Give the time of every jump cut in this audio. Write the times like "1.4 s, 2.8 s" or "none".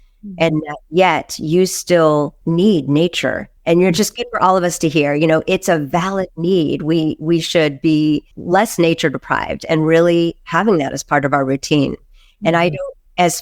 2.4 s, 3.6 s, 8.3 s